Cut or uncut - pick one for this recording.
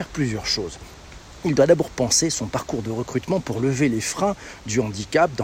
uncut